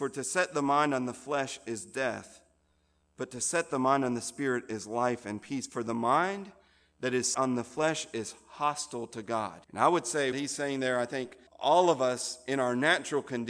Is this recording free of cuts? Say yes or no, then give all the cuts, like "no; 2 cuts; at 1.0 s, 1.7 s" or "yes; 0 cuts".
no; 4 cuts; at 7.3 s, 9.6 s, 10.3 s, 11.5 s